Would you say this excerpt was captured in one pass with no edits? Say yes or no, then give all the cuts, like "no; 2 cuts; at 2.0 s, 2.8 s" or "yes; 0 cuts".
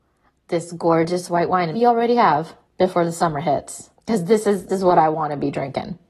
no; 4 cuts; at 1.7 s, 2.6 s, 3.9 s, 4.7 s